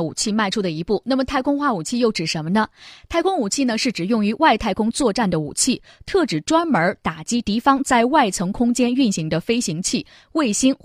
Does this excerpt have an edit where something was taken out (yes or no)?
no